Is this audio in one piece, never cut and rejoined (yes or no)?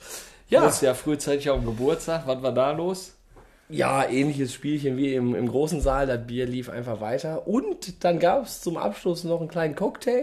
yes